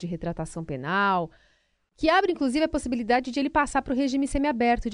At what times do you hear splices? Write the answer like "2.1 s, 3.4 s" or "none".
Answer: none